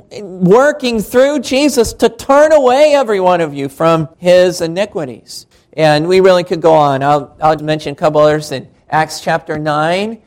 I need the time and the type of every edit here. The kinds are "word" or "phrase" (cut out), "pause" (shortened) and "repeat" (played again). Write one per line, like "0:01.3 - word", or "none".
0:04.1 - pause
0:05.5 - pause
0:07.6 - word